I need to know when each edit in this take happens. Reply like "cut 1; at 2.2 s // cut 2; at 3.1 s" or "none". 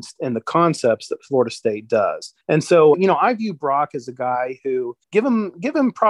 cut 1; at 2.4 s // cut 2; at 2.9 s // cut 3; at 5.0 s